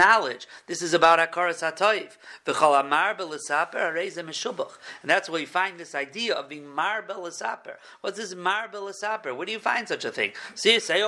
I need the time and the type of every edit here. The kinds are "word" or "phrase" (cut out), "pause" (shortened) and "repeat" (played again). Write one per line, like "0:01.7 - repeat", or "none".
none